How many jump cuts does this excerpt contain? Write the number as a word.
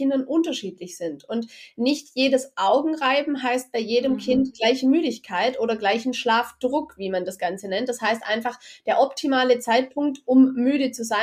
zero